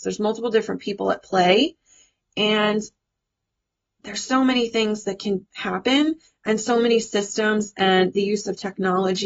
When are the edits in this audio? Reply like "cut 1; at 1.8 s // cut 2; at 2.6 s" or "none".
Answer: none